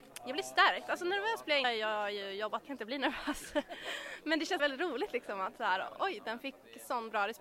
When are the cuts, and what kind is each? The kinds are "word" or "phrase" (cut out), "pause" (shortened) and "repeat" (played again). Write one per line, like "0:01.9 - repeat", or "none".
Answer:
0:01.6 - phrase
0:02.6 - phrase
0:04.6 - word